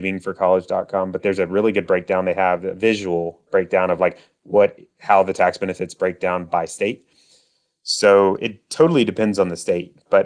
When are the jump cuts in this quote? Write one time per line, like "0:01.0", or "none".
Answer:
none